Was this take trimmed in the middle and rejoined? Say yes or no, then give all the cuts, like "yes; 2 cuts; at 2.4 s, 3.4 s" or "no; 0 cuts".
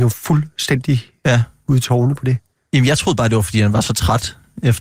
no; 0 cuts